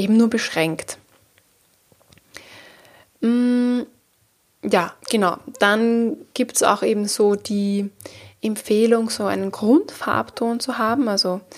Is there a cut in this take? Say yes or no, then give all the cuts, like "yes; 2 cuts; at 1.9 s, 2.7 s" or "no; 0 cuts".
yes; 1 cut; at 5.0 s